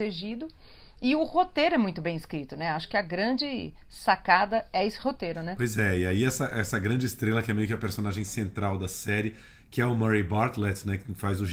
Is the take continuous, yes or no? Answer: yes